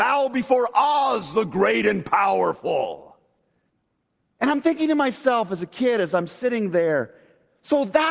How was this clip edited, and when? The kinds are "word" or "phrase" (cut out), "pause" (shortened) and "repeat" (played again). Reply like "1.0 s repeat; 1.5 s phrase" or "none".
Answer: 3.7 s pause

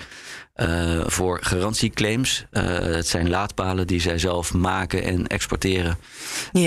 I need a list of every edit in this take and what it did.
1.1 s word

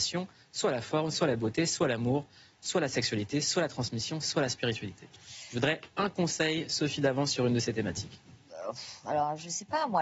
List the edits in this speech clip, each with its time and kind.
5.9 s pause

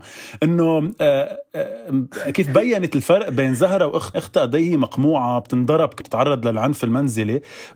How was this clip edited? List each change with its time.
4.1 s word; 6.0 s word

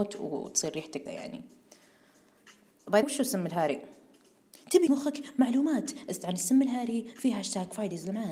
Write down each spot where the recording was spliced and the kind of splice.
1.1 s word; 3.0 s word; 4.9 s word

